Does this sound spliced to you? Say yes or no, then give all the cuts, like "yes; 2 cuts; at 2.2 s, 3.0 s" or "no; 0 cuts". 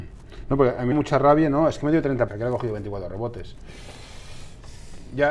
yes; 2 cuts; at 0.9 s, 2.3 s